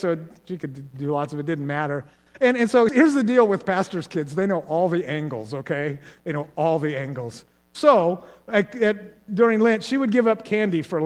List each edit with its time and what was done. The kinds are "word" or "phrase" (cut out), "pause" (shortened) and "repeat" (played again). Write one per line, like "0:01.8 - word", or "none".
0:02.9 - word